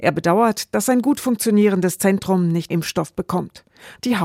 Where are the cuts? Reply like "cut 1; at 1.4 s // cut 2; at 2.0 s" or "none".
cut 1; at 2.7 s